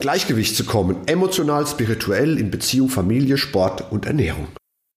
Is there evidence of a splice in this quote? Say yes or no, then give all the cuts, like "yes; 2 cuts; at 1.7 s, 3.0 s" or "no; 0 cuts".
no; 0 cuts